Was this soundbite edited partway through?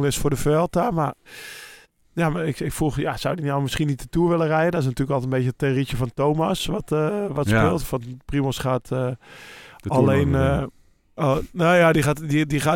no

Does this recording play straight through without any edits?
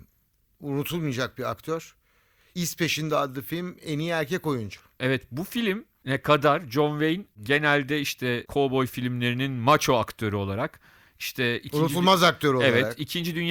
yes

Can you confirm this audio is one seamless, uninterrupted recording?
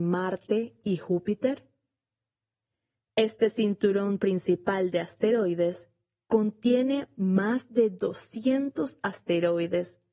yes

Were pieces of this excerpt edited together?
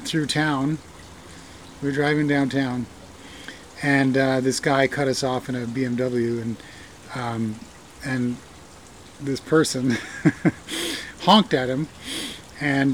no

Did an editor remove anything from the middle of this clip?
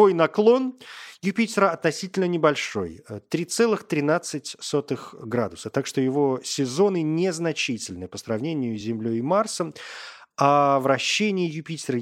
no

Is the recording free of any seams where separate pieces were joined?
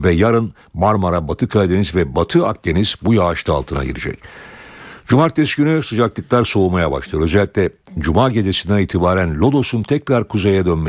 no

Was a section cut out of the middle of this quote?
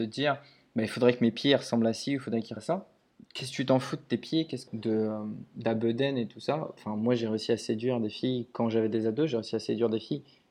yes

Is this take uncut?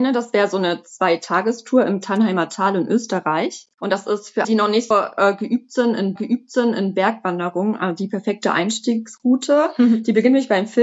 no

